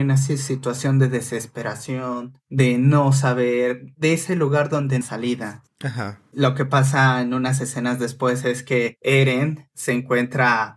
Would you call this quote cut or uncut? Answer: cut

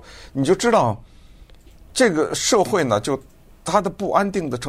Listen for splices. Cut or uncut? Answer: uncut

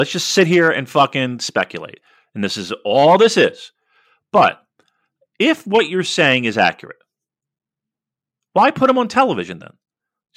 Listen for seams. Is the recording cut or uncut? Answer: uncut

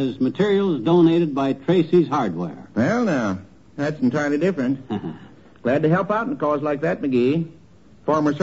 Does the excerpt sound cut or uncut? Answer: uncut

